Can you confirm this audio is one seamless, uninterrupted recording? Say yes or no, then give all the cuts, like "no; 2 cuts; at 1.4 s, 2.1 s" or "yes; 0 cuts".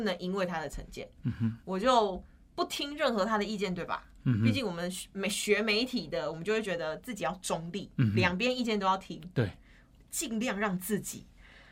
yes; 0 cuts